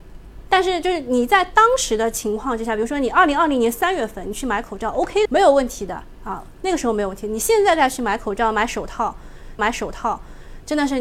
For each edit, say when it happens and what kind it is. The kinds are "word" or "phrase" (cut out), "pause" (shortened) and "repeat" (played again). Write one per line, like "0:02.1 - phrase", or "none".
0:05.2 - word
0:09.6 - repeat